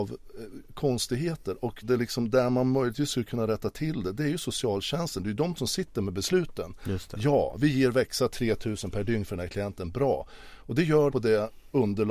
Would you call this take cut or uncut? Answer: cut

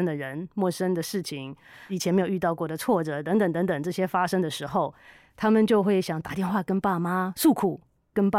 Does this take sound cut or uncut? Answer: uncut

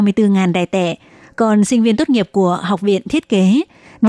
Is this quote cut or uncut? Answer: uncut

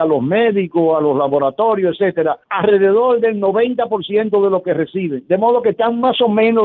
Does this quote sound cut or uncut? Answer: cut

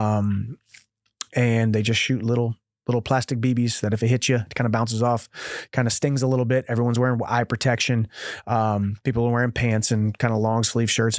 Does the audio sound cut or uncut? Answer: uncut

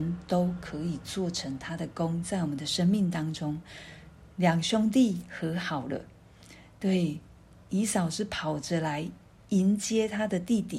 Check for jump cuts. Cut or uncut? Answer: uncut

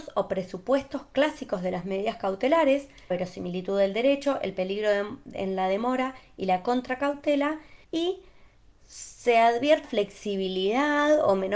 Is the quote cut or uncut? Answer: cut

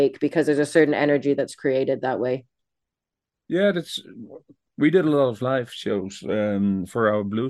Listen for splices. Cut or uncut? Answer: uncut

